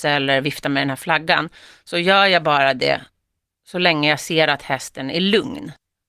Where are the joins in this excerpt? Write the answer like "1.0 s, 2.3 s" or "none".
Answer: none

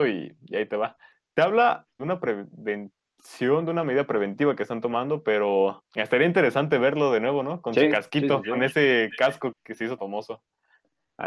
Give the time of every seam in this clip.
1.1 s, 1.9 s, 9.5 s, 10.0 s

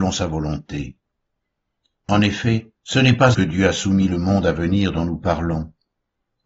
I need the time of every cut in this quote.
2.8 s, 3.3 s

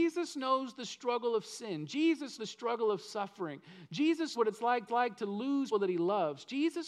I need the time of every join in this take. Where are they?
2.4 s, 4.3 s, 4.9 s, 5.7 s

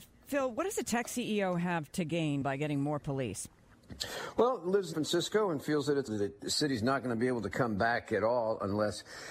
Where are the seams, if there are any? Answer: 2.4 s, 4.9 s, 6.1 s

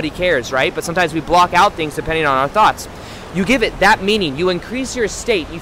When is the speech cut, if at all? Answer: none

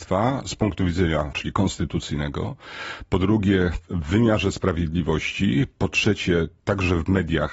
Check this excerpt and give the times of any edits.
1.3 s

